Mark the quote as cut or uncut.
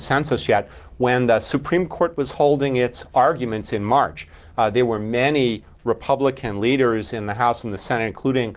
uncut